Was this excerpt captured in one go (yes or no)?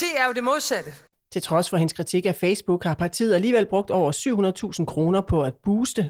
yes